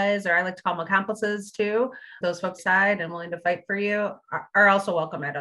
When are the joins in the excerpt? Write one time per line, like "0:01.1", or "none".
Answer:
0:02.2
0:02.6